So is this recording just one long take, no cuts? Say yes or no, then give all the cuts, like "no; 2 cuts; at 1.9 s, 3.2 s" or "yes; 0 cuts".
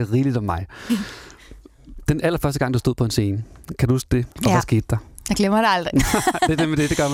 no; 1 cut; at 4.3 s